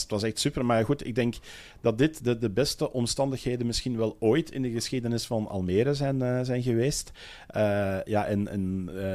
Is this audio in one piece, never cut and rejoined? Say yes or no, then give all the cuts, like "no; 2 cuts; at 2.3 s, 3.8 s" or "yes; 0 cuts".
yes; 0 cuts